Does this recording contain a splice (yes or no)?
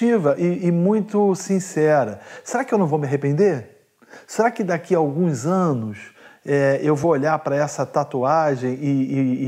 no